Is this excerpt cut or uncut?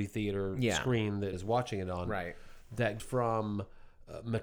cut